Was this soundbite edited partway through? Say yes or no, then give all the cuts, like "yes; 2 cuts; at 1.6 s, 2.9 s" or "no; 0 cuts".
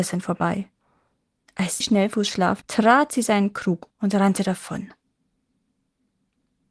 yes; 3 cuts; at 1.8 s, 2.6 s, 3.9 s